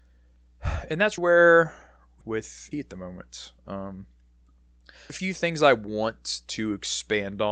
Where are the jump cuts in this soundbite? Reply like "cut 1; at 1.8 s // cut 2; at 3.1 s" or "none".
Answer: cut 1; at 1.2 s // cut 2; at 2.2 s // cut 3; at 2.7 s // cut 4; at 5.1 s